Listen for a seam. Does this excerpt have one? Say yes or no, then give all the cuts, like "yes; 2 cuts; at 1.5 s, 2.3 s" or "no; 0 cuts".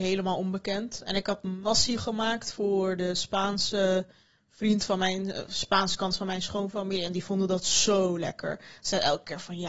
no; 0 cuts